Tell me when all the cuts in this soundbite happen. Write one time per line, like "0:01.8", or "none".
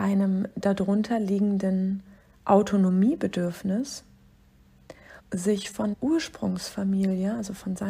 0:05.2
0:05.9